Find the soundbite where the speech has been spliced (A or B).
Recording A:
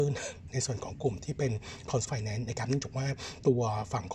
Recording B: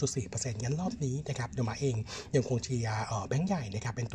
A